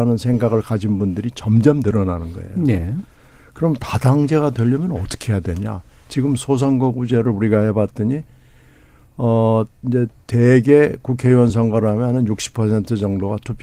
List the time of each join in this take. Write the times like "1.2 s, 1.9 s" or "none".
none